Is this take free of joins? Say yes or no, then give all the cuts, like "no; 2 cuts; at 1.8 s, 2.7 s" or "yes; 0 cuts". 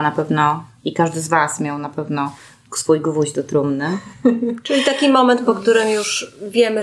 yes; 0 cuts